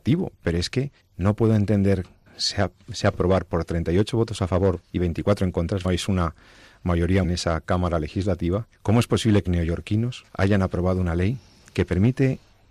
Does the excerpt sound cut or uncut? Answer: cut